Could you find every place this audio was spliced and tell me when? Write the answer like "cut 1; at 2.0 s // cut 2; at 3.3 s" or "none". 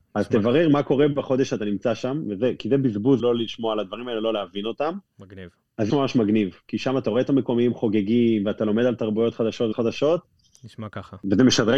cut 1; at 3.2 s // cut 2; at 5.9 s // cut 3; at 9.7 s